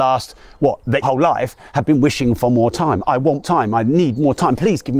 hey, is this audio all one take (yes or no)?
no